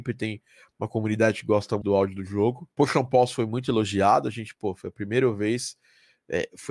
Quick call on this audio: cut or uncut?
cut